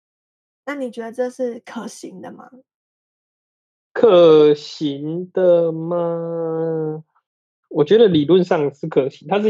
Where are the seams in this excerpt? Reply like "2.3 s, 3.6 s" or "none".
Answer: none